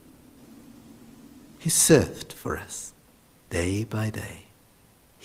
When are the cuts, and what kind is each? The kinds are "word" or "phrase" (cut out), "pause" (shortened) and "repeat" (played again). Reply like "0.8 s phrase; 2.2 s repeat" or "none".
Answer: none